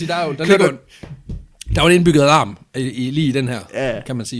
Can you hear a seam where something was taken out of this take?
no; 0 cuts

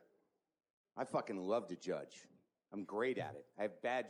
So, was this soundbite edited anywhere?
no; 0 cuts

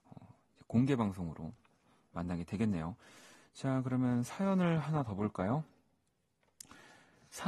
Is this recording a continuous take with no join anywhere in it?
yes; 0 cuts

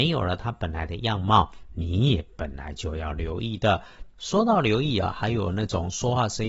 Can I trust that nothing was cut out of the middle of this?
no; 1 cut; at 4.1 s

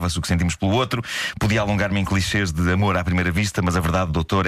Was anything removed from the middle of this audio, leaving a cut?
no; 0 cuts

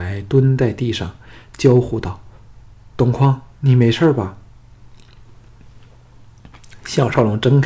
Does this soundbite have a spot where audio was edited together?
yes; 1 cut; at 2.4 s

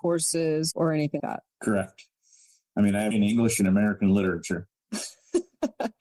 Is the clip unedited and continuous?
no; 4 cuts; at 1.2 s, 1.5 s, 3.1 s, 4.7 s

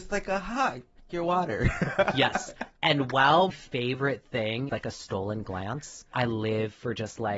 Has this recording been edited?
yes; 4 cuts; at 1.1 s, 3.5 s, 4.7 s, 6.1 s

